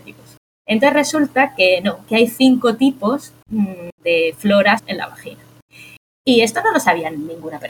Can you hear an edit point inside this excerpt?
yes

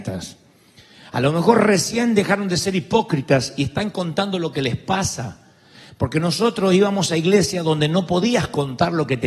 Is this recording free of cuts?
yes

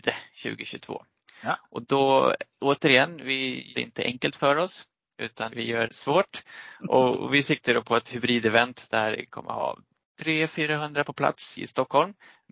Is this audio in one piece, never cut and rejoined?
no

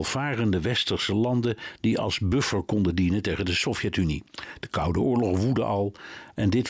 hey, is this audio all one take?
yes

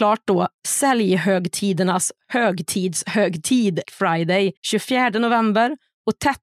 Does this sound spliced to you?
yes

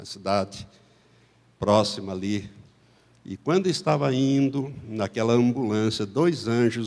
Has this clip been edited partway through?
no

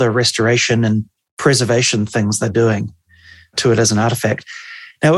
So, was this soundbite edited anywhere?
no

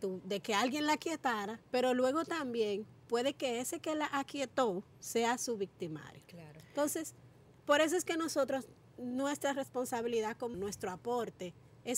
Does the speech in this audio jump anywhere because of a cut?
yes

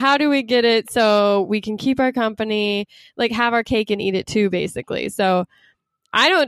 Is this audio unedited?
yes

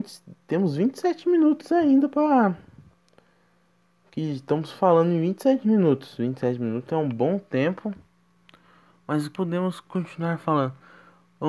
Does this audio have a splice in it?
yes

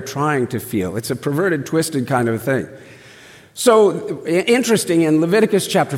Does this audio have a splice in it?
no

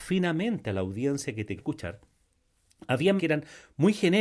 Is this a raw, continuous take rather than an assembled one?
no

